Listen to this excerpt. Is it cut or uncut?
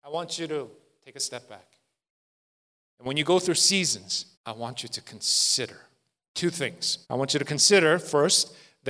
cut